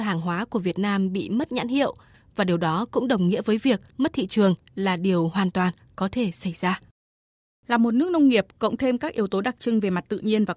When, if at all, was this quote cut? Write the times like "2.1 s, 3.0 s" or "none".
3.9 s

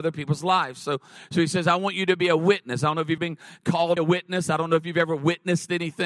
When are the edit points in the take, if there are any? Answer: 3.2 s, 4.0 s

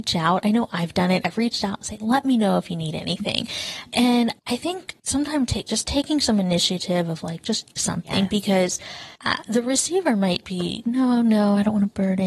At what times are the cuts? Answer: 4.4 s, 5.0 s, 7.8 s, 9.2 s, 10.8 s

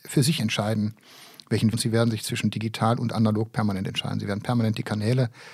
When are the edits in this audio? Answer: 1.7 s

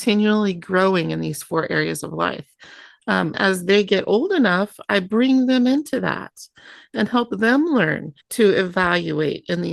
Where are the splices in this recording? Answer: 3.3 s, 8.2 s

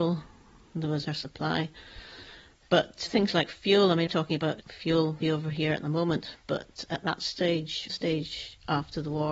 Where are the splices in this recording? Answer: 1.1 s, 3.1 s, 4.1 s, 4.6 s, 5.2 s, 7.9 s

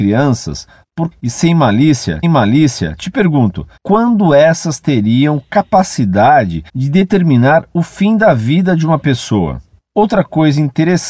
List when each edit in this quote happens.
1.1 s, 2.2 s, 3.8 s, 6.7 s

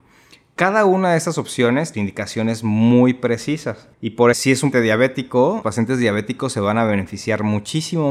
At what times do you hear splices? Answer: 1.9 s, 3.9 s, 4.3 s, 4.7 s, 5.6 s

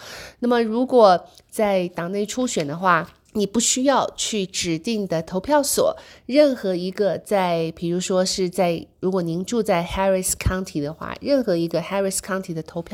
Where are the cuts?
none

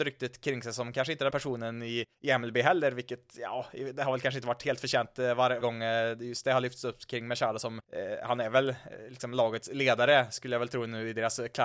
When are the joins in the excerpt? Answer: 1.3 s, 2.1 s, 5.6 s, 7.8 s

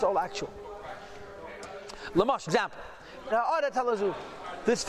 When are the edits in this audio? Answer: 2.5 s, 3.3 s

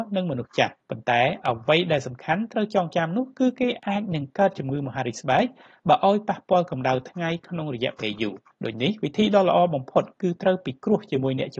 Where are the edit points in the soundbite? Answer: none

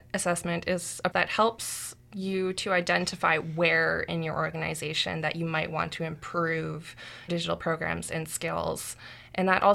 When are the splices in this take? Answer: 1.1 s, 2.0 s, 7.3 s

